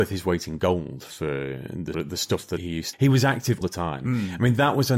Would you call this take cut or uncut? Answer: cut